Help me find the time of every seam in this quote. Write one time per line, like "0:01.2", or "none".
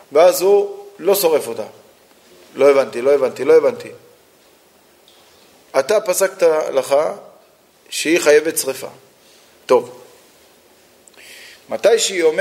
none